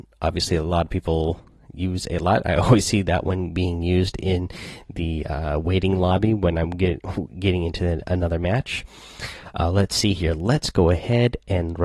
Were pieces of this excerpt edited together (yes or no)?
no